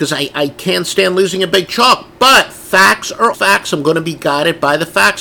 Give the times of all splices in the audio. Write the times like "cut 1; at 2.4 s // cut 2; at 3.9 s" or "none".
cut 1; at 3.3 s